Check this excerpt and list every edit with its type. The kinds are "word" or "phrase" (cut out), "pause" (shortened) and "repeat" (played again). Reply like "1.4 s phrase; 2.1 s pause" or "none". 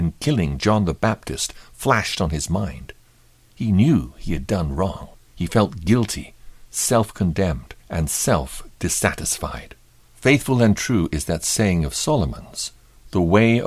5.1 s pause; 7.8 s pause